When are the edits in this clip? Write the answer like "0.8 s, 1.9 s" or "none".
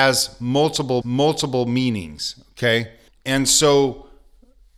1.0 s, 3.1 s